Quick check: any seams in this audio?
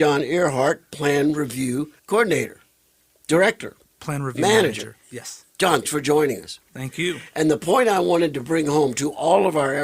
yes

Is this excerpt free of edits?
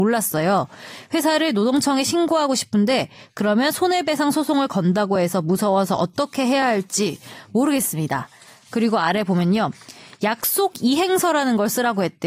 yes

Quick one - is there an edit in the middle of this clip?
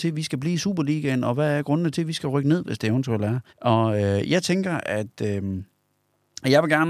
yes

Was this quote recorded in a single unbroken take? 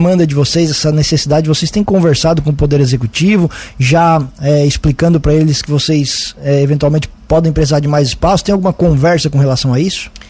yes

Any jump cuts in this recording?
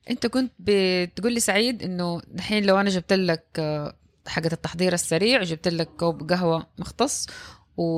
no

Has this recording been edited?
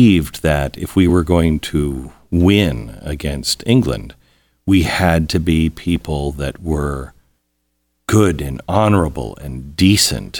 no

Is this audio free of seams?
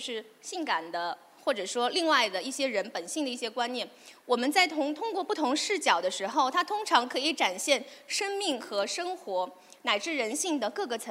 yes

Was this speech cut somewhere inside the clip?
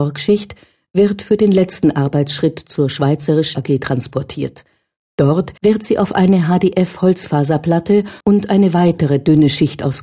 yes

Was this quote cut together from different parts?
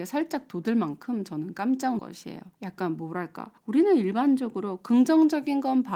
yes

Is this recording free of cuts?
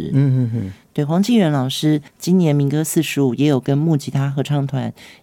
no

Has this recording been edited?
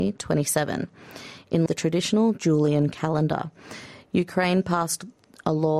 yes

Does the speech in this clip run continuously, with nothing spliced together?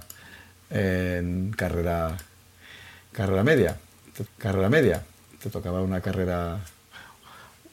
no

